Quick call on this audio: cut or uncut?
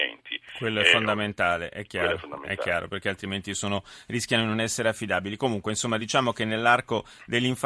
uncut